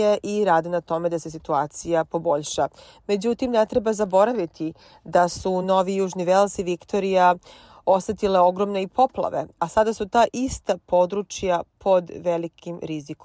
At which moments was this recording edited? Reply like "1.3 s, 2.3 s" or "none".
none